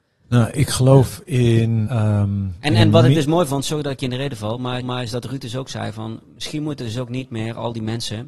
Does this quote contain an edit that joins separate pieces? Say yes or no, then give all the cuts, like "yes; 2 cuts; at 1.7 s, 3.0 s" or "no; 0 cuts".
yes; 2 cuts; at 1.9 s, 4.8 s